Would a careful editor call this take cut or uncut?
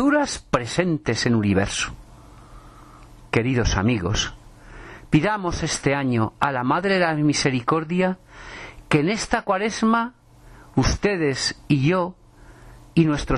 uncut